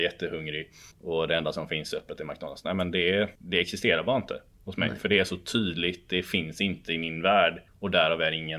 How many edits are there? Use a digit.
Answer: 3